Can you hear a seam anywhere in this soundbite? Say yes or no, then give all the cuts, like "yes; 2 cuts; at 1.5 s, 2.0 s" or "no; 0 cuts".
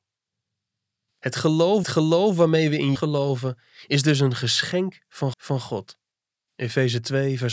yes; 3 cuts; at 1.8 s, 3.0 s, 5.3 s